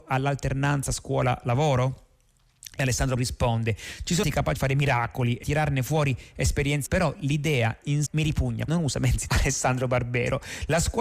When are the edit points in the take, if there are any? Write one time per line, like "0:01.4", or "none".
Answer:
0:03.2
0:04.2
0:04.6
0:05.4
0:06.9
0:08.1
0:08.7
0:09.3